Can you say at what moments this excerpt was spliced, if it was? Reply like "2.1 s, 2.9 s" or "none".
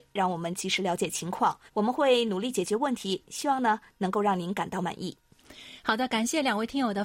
1.7 s